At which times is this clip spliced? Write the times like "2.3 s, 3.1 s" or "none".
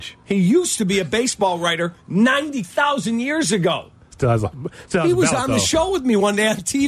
none